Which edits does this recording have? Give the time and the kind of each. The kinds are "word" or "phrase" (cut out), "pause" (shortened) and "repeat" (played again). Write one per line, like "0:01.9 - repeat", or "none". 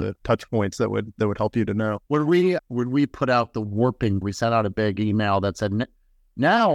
0:02.0 - pause
0:02.6 - word
0:04.2 - word